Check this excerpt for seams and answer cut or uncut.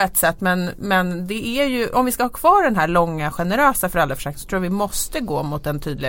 uncut